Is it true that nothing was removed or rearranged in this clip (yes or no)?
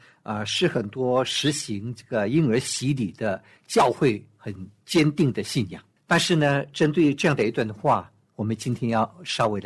yes